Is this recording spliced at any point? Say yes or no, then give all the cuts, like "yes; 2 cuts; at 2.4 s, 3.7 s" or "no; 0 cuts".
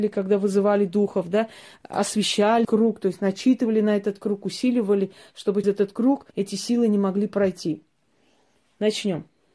yes; 3 cuts; at 2.6 s, 5.6 s, 6.3 s